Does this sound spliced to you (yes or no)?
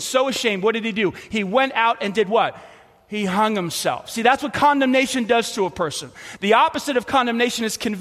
no